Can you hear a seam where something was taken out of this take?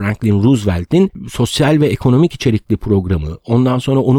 no; 0 cuts

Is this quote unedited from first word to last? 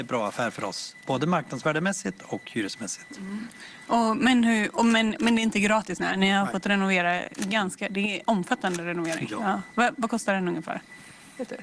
yes; 0 cuts

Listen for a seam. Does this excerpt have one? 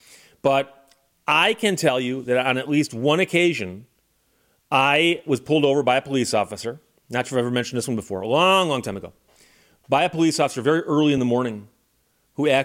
no; 0 cuts

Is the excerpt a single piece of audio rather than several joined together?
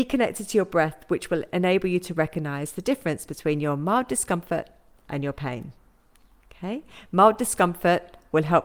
yes; 0 cuts

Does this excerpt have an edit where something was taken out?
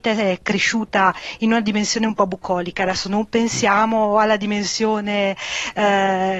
no; 0 cuts

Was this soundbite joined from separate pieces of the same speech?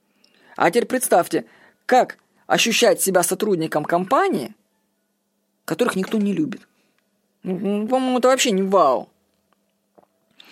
no; 0 cuts

